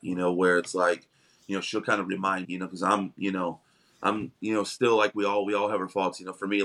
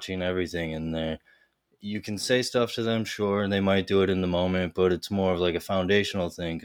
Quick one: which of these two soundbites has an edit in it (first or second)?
first